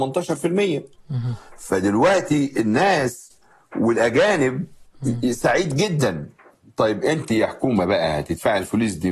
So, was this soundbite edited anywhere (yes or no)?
no